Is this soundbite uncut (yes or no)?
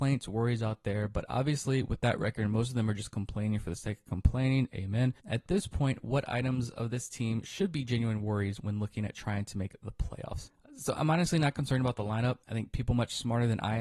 no